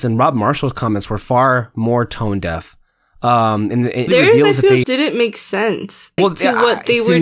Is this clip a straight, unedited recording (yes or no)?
no